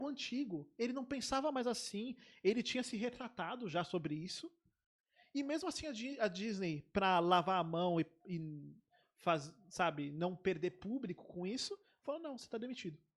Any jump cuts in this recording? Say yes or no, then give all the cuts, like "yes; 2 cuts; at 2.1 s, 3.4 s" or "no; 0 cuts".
no; 0 cuts